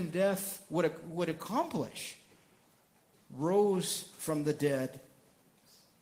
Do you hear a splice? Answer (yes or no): yes